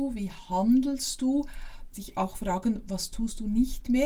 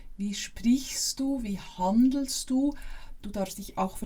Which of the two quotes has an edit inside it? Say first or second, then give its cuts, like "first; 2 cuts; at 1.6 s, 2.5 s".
first; 1 cut; at 1.9 s